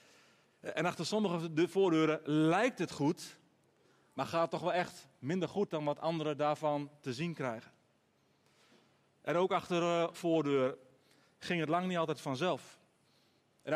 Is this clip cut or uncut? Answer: cut